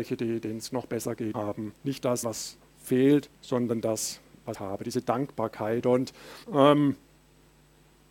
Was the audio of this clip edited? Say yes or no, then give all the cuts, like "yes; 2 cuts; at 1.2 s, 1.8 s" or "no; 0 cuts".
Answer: yes; 6 cuts; at 1.3 s, 1.8 s, 2.2 s, 3.3 s, 4.5 s, 6.4 s